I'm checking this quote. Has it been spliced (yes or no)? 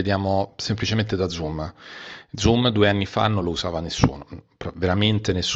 no